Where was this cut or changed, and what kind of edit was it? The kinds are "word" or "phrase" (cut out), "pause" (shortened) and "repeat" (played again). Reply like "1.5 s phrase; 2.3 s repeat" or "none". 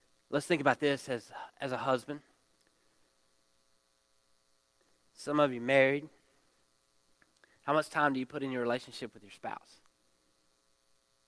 none